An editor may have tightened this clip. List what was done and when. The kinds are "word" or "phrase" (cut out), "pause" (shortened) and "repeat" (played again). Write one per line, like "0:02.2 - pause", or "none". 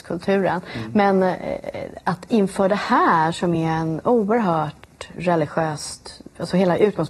none